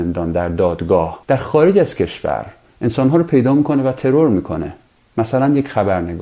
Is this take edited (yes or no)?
yes